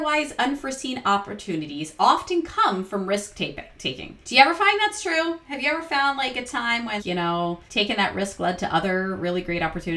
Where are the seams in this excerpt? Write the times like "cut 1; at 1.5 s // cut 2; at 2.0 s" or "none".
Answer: cut 1; at 4.2 s // cut 2; at 7.0 s // cut 3; at 7.7 s